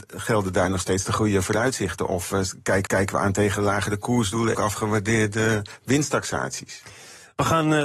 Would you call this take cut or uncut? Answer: cut